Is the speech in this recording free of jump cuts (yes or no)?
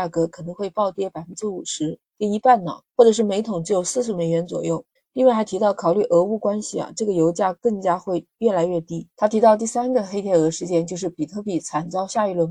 no